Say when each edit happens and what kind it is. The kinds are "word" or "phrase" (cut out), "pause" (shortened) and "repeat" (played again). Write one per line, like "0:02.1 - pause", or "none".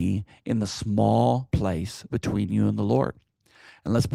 0:01.5 - word
0:02.1 - word